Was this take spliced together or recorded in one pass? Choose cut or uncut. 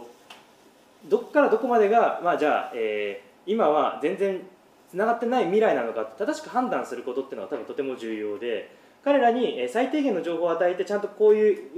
uncut